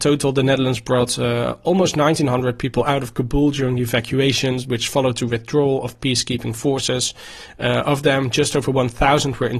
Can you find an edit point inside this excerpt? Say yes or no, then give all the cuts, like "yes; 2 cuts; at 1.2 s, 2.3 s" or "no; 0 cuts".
no; 0 cuts